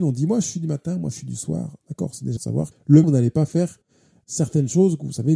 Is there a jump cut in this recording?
yes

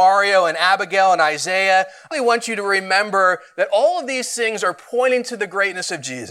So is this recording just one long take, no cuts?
no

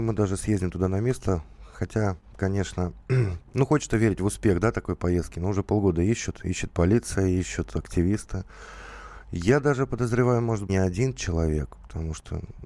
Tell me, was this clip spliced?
yes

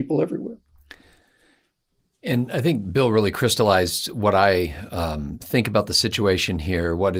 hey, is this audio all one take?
yes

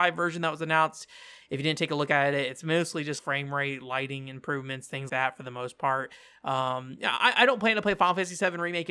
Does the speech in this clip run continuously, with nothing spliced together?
no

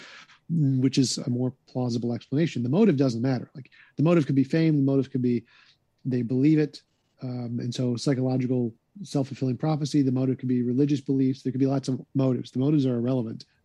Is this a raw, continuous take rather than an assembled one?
yes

